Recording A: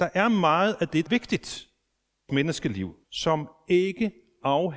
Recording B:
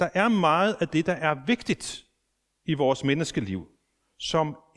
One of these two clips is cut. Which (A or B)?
A